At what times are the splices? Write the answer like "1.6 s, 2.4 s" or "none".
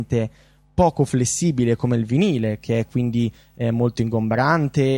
none